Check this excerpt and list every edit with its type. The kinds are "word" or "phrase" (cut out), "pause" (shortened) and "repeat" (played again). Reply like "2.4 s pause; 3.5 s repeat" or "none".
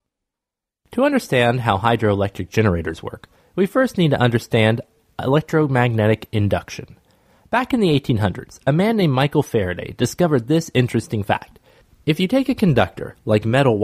none